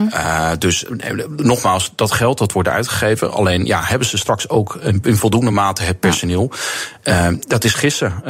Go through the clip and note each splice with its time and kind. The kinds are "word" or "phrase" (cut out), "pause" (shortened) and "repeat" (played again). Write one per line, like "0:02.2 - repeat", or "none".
none